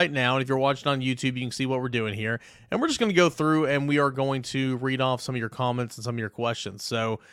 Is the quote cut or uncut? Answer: uncut